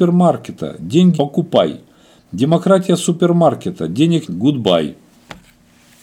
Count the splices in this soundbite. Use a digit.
2